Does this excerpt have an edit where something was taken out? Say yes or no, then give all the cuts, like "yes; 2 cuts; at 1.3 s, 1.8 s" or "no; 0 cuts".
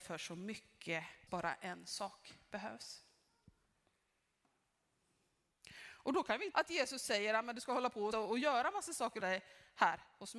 yes; 4 cuts; at 1.3 s, 6.5 s, 8.1 s, 9.2 s